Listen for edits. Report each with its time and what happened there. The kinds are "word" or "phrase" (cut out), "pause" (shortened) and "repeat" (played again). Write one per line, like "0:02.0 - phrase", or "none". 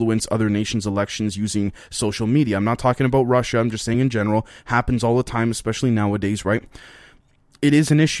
none